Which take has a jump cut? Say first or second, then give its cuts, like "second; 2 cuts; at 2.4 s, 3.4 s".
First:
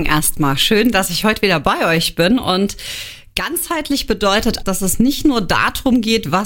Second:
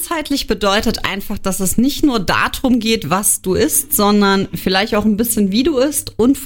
first; 1 cut; at 4.6 s